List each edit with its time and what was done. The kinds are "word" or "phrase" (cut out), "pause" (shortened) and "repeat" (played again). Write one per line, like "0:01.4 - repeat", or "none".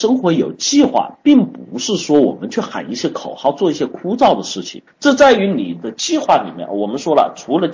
0:04.9 - pause